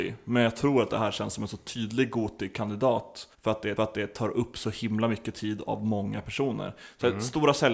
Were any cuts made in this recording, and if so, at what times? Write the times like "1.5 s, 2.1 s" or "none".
3.3 s, 3.8 s